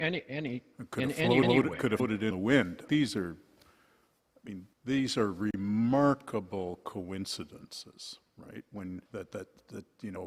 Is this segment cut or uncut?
cut